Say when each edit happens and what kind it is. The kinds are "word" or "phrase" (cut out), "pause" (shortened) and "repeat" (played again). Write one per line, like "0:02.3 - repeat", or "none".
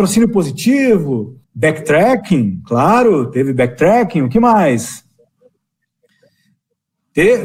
0:01.4 - pause

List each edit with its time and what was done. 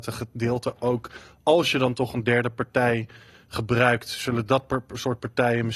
none

